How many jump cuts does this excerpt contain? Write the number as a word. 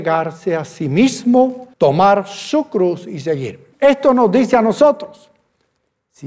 two